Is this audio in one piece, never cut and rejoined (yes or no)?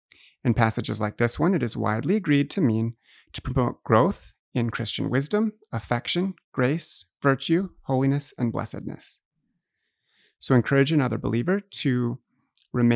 yes